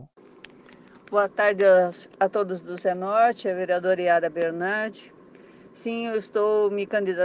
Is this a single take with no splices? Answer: yes; 0 cuts

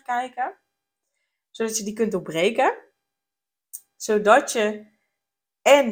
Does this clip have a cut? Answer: no; 0 cuts

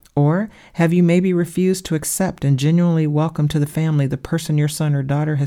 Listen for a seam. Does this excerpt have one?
no; 0 cuts

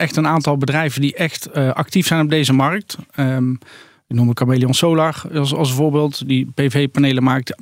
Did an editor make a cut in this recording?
no; 0 cuts

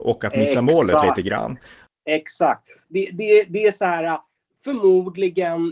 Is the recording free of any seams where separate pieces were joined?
yes; 0 cuts

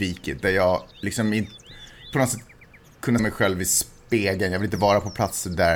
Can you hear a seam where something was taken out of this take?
yes; 3 cuts; at 0.9 s, 2.1 s, 3.2 s

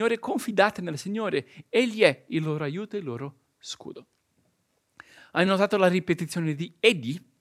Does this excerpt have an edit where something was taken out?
no; 0 cuts

